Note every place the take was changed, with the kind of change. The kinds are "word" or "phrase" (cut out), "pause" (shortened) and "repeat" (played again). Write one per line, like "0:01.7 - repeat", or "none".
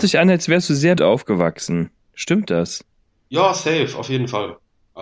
0:01.0 - word